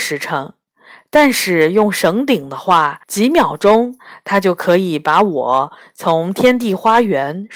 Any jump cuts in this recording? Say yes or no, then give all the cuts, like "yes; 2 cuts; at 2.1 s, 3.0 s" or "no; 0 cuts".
yes; 1 cut; at 3.0 s